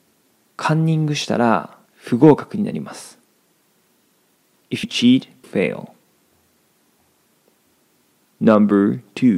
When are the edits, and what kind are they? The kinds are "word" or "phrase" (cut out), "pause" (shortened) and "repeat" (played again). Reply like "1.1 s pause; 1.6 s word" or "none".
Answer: 1.9 s pause; 4.8 s word; 5.4 s phrase